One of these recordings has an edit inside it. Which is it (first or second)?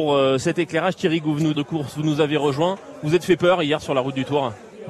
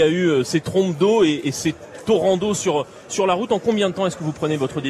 first